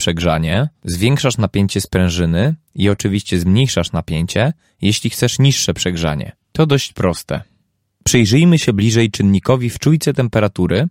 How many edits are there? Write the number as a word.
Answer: zero